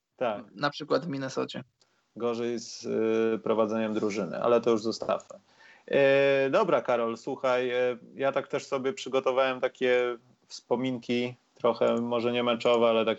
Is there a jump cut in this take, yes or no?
no